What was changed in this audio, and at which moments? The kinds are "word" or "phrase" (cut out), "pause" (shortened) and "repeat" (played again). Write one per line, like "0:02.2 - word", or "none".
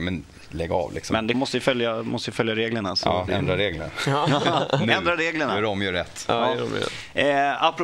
0:01.3 - phrase
0:03.3 - word